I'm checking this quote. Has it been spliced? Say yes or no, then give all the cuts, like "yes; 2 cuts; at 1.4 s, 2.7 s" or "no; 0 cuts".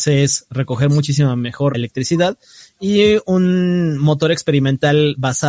yes; 1 cut; at 1.7 s